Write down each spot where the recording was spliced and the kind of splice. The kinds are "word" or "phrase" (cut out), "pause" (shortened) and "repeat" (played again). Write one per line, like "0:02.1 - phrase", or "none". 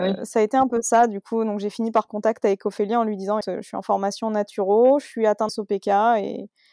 0:02.1 - word
0:03.4 - word
0:05.5 - word